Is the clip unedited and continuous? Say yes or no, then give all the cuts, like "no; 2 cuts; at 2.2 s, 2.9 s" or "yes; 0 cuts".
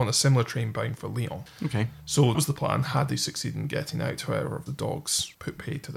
no; 2 cuts; at 2.3 s, 4.7 s